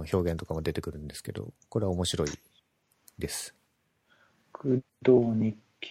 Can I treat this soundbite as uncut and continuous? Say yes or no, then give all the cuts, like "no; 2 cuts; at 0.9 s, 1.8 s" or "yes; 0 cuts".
yes; 0 cuts